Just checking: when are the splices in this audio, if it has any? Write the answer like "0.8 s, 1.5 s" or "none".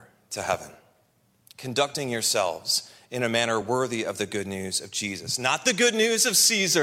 none

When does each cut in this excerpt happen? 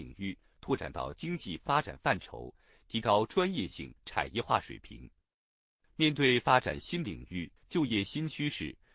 4.0 s, 7.6 s

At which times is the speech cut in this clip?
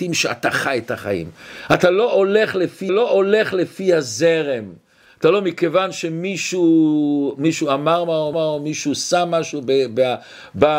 2.9 s, 8.3 s

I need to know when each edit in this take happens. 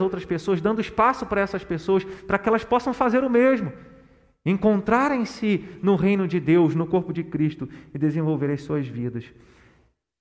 none

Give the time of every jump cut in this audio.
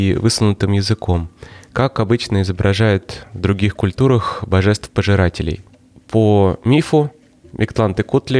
none

